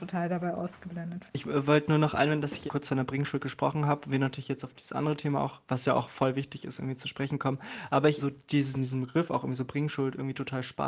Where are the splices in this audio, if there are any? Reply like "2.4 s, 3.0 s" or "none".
1.3 s, 2.7 s, 8.2 s